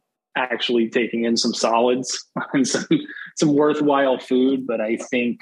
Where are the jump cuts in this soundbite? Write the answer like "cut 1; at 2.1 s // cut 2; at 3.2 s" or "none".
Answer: none